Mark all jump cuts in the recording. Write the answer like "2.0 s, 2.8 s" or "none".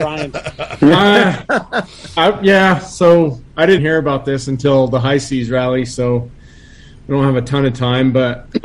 3.8 s